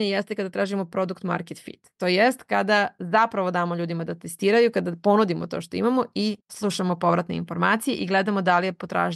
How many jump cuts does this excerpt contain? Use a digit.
1